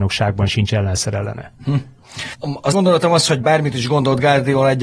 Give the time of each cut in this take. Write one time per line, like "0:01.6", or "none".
0:02.7

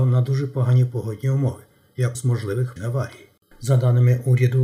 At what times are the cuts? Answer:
0:02.1
0:02.8
0:03.4

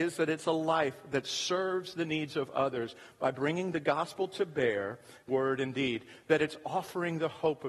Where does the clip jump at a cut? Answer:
0:05.3

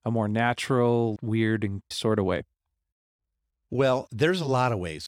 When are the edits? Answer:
0:01.2
0:01.9

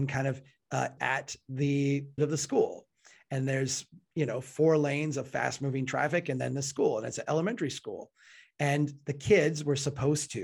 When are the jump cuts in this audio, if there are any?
0:01.0
0:02.2

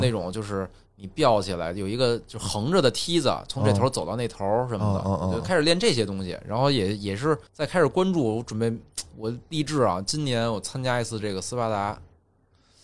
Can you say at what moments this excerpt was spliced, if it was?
0:07.5

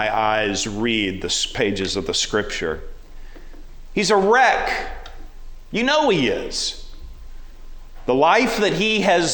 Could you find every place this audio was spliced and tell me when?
none

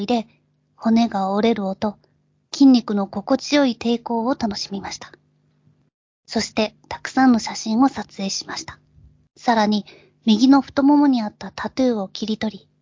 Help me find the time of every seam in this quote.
none

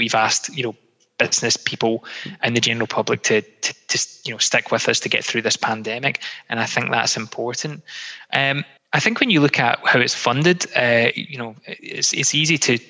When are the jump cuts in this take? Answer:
0:08.8
0:11.1

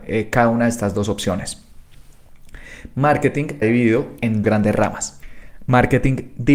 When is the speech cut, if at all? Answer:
0:03.6
0:04.4

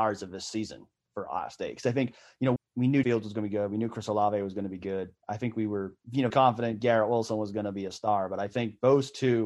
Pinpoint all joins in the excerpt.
0:02.6
0:03.0
0:06.3

